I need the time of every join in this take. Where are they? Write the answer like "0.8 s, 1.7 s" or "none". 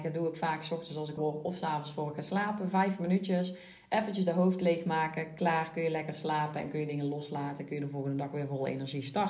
1.2 s

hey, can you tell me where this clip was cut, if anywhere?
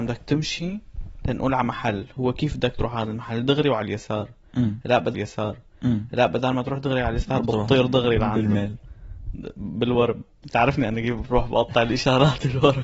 5.1 s

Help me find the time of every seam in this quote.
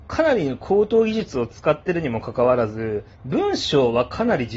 3.1 s

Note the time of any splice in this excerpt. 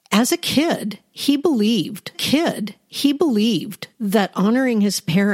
2.1 s

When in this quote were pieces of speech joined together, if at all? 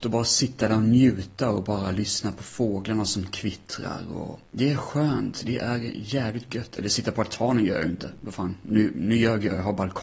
4.5 s

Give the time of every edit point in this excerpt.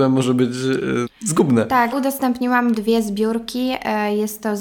1.1 s, 1.9 s, 2.7 s

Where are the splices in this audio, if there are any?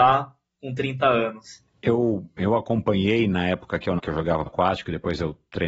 1.7 s, 4.0 s, 4.5 s

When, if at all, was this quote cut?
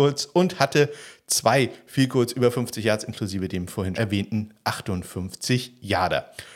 3.9 s

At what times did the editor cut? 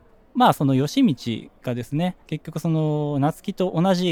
2.2 s

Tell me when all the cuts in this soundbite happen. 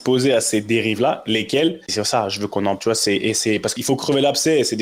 1.9 s, 2.8 s, 3.8 s

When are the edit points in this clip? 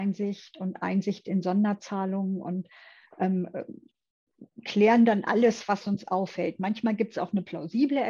none

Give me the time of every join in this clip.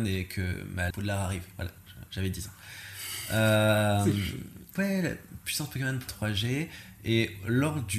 0.9 s, 4.8 s, 6.1 s

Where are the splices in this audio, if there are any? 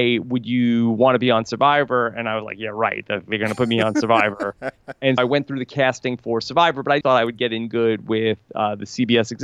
5.2 s, 7.0 s

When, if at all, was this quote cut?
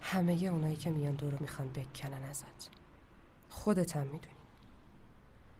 1.4 s

